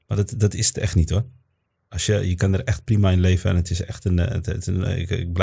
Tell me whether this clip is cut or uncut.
uncut